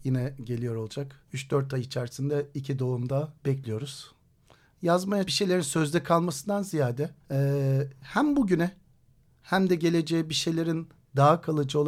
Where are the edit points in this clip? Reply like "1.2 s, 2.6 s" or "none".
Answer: 1.2 s, 3.4 s, 5.3 s, 7.2 s